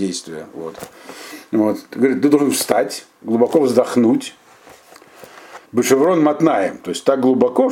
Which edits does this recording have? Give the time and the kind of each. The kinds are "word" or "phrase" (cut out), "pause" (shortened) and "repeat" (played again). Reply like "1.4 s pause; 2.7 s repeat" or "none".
5.7 s pause